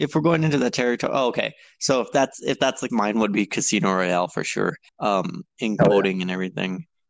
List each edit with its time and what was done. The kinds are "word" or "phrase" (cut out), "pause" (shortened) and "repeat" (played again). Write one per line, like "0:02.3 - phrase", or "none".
0:02.9 - word
0:04.9 - pause